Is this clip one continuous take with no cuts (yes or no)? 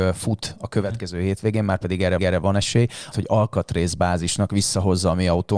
no